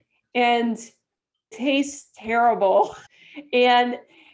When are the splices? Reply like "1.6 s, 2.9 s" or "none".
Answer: 1.5 s, 3.1 s